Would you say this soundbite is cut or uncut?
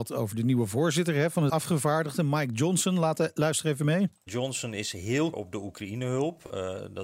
cut